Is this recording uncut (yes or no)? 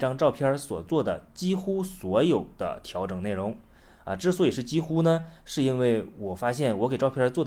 yes